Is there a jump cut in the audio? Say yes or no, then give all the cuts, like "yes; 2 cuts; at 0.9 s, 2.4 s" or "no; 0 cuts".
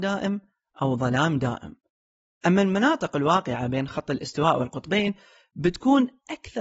no; 0 cuts